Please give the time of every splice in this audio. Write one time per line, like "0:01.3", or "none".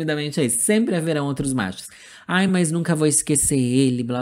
none